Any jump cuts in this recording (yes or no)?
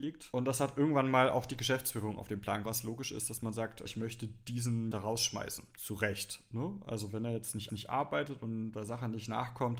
yes